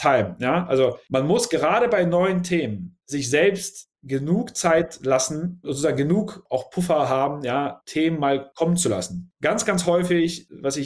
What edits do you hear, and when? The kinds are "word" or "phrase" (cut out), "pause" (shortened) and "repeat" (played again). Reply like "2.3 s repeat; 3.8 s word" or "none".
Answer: 7.8 s word